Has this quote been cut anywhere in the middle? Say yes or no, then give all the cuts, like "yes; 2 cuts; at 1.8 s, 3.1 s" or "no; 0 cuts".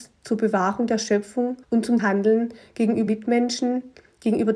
yes; 3 cuts; at 1.6 s, 2.0 s, 3.1 s